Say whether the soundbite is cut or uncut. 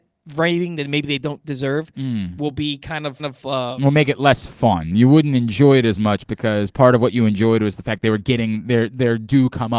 cut